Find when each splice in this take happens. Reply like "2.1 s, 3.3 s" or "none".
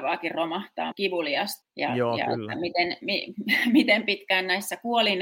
0.9 s, 1.6 s